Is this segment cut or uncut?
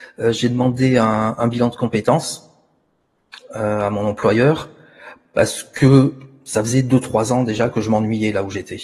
uncut